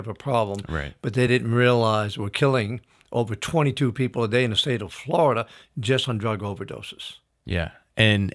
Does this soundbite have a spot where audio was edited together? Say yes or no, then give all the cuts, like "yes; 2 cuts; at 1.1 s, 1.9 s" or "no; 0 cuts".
no; 0 cuts